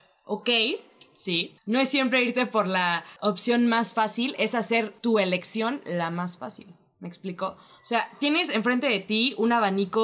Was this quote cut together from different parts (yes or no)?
no